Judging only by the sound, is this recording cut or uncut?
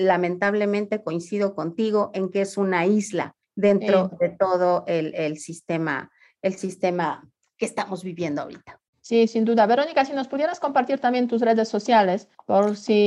uncut